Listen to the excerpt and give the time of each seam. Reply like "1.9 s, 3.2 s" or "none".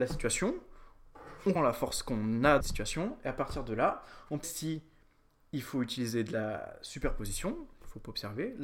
1.6 s, 2.6 s, 4.4 s